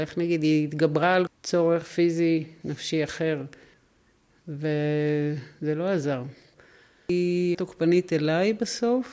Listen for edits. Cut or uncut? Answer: cut